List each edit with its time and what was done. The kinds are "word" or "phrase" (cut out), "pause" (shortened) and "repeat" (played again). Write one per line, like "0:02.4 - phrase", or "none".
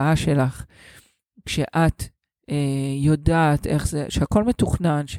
none